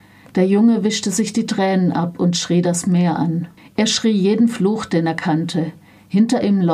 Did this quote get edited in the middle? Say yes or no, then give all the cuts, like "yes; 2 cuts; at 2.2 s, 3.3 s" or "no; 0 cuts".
yes; 1 cut; at 3.6 s